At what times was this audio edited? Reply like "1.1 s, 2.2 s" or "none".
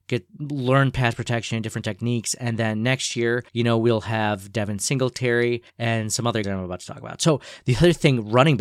3.5 s, 5.7 s, 6.4 s